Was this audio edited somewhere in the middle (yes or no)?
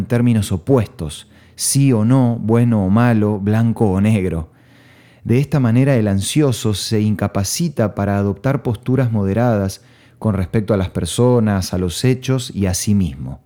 no